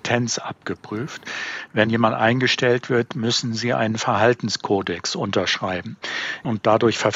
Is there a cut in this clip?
yes; 1 cut; at 1.9 s

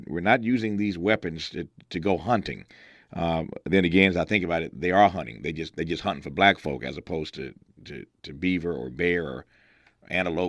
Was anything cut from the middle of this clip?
no; 0 cuts

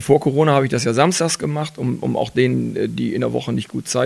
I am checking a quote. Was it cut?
no; 0 cuts

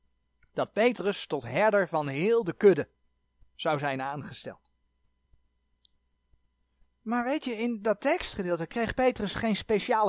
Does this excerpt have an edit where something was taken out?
no; 0 cuts

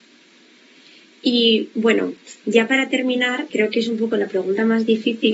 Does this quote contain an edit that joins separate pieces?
yes; 1 cut; at 3.5 s

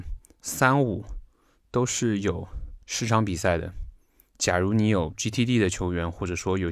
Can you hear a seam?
no; 0 cuts

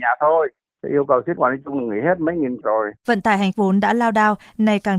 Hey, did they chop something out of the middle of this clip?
yes; 4 cuts; at 1.4 s, 2.6 s, 3.0 s, 3.5 s

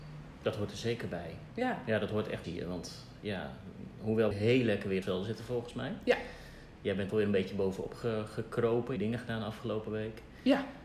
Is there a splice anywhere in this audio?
yes; 5 cuts; at 2.4 s, 4.3 s, 5.0 s, 7.1 s, 9.0 s

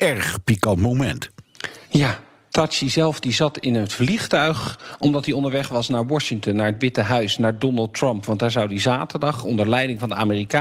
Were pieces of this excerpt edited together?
yes; 1 cut; at 1.8 s

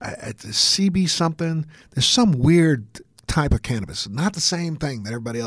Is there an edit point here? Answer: no; 0 cuts

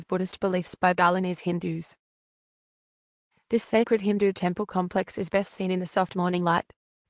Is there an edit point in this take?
no; 0 cuts

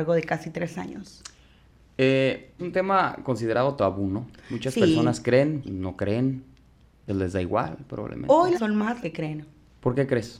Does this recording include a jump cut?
yes; 5 cuts; at 2.6 s, 5.6 s, 7.1 s, 8.5 s, 9.0 s

